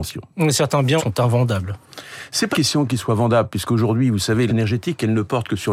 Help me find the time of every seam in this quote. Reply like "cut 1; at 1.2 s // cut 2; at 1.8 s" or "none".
cut 1; at 1.0 s // cut 2; at 2.5 s // cut 3; at 4.5 s